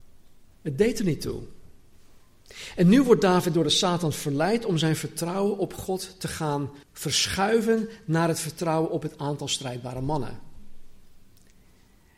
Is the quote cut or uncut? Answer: cut